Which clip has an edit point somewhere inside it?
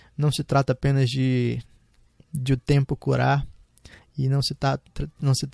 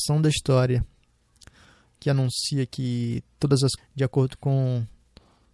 second; 1 cut; at 3.8 s

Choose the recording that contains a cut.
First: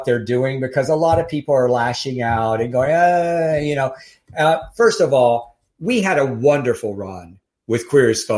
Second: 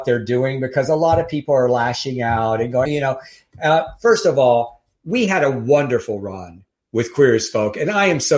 second; 1 cut; at 2.9 s

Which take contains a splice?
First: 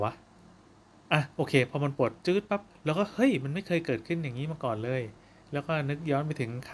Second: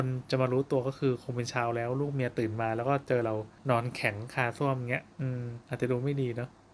second; 3 cuts; at 3.6 s, 5.1 s, 5.6 s

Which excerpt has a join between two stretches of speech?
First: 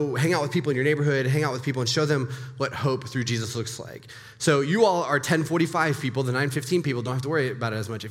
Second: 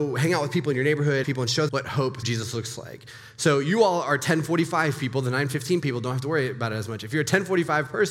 second; 3 cuts; at 1.2 s, 1.7 s, 2.2 s

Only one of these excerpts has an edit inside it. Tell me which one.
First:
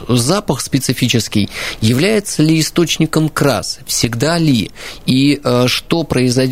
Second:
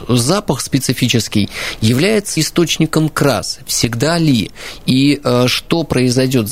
second; 1 cut; at 2.4 s

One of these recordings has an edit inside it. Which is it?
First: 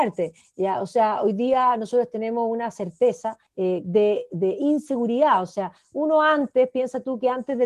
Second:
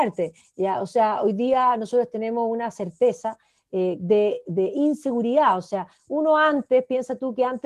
first; 1 cut; at 3.5 s

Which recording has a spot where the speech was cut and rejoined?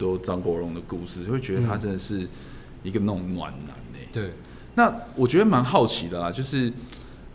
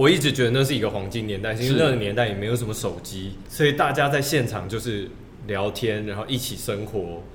second; 1 cut; at 3.4 s

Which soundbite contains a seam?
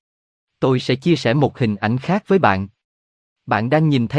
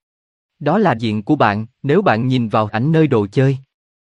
second; 3 cuts; at 1.0 s, 1.7 s, 2.7 s

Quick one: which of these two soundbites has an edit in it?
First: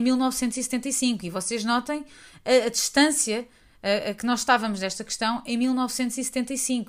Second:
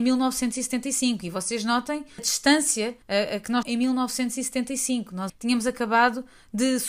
second; 4 cuts; at 2.2 s, 3.0 s, 3.6 s, 5.3 s

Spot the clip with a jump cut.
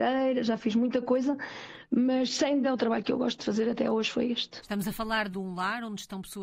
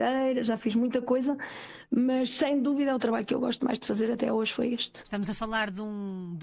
first; 3 cuts; at 2.6 s, 3.4 s, 5.3 s

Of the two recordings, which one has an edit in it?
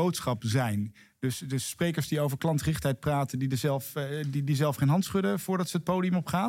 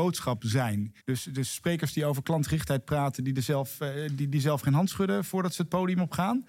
second; 1 cut; at 1.0 s

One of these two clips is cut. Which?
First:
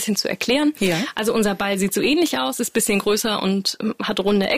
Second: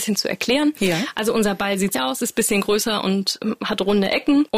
second; 1 cut; at 1.9 s

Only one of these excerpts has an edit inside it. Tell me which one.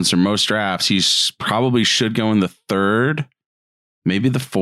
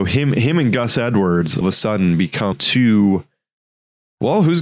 second; 2 cuts; at 1.6 s, 2.5 s

